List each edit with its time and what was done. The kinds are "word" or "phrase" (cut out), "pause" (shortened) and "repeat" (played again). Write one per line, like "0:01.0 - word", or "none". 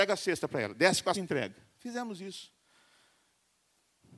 0:01.1 - word